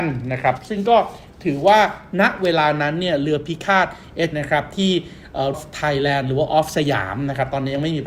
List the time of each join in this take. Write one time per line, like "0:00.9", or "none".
0:04.3
0:05.5